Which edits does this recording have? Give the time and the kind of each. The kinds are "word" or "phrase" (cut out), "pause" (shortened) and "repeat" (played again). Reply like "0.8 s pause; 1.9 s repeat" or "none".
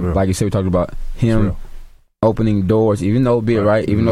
none